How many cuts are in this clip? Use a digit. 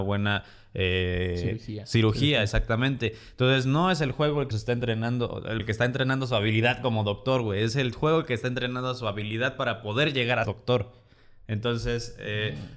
3